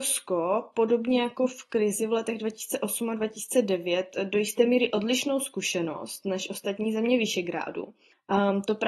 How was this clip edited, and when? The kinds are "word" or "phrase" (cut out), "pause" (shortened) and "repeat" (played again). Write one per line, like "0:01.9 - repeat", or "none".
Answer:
none